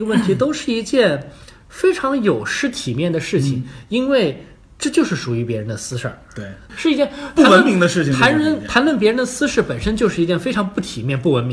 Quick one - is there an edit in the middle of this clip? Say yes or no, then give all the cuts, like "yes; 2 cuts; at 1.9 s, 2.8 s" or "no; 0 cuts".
no; 0 cuts